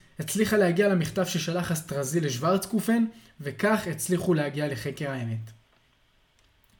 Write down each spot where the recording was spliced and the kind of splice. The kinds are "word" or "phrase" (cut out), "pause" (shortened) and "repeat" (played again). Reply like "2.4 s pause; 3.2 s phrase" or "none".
none